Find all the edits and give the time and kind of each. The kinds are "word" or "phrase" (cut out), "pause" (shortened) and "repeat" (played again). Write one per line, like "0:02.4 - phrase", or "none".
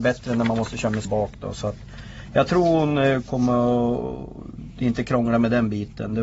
0:01.0 - word